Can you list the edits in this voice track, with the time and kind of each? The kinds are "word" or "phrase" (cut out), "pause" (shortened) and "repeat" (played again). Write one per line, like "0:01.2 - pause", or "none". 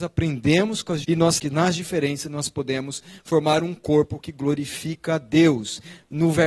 0:01.0 - word
0:01.4 - word